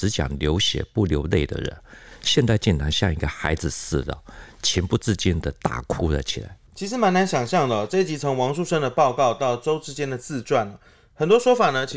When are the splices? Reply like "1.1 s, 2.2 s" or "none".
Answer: none